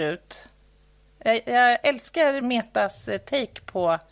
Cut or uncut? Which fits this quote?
uncut